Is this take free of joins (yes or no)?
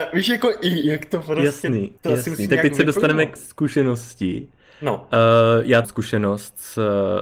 no